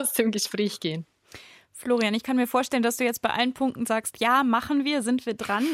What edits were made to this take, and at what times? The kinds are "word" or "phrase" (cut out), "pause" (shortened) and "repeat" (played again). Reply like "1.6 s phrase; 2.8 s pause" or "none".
none